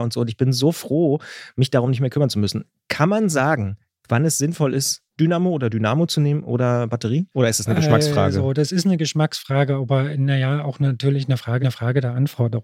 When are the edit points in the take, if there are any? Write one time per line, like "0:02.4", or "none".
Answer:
0:03.9
0:05.1
0:07.3
0:11.6